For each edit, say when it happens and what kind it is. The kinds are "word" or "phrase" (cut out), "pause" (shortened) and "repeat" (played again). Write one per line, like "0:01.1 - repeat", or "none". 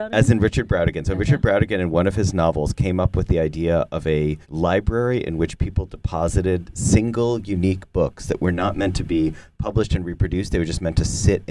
0:04.4 - pause